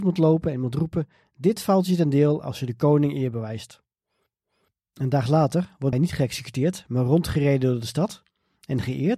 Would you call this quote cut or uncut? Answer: cut